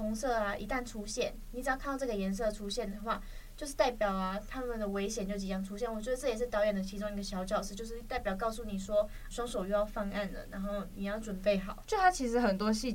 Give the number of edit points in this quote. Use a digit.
1